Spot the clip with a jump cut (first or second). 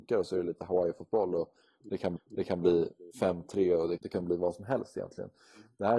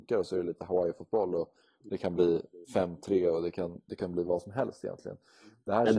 first